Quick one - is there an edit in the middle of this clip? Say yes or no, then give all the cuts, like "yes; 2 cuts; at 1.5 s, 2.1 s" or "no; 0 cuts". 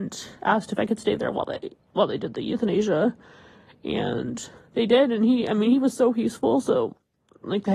no; 0 cuts